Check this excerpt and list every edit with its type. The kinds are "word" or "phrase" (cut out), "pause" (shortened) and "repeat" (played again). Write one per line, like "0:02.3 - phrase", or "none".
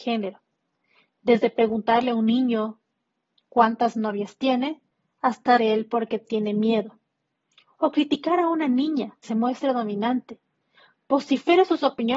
0:05.6 - word
0:09.2 - word